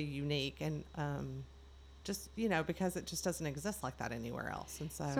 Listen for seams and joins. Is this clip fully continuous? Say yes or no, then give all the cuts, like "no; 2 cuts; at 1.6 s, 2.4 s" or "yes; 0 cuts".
yes; 0 cuts